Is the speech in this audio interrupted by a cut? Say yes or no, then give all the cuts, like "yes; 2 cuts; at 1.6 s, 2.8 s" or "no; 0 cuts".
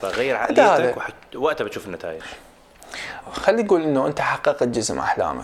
yes; 1 cut; at 3.2 s